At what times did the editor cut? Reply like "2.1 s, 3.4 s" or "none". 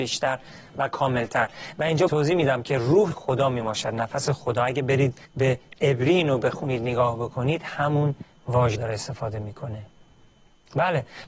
2.1 s, 3.1 s, 5.3 s, 8.7 s